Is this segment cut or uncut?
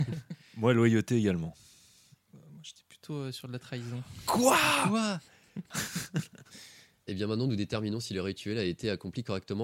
cut